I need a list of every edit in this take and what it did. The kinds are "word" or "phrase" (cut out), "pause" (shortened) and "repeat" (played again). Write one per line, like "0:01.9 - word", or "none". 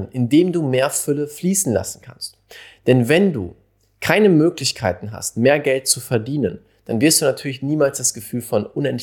none